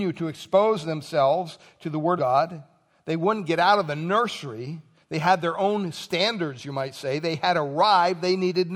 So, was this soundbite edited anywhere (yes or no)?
yes